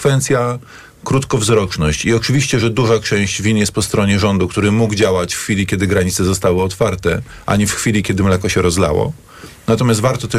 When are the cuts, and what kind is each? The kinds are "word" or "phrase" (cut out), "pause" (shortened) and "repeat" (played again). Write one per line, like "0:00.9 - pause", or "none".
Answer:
none